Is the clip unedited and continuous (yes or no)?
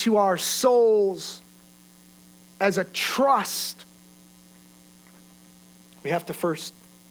yes